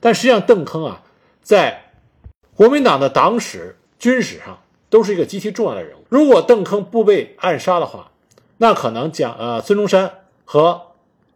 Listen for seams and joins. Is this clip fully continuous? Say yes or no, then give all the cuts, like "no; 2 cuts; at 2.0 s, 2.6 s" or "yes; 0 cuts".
no; 2 cuts; at 3.9 s, 6.1 s